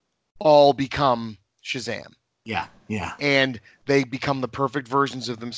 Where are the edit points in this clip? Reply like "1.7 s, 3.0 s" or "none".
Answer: none